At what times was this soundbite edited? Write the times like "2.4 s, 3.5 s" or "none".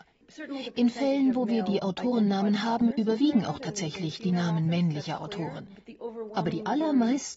none